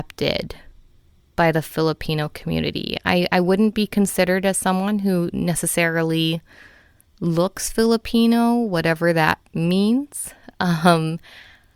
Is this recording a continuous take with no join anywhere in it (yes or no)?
yes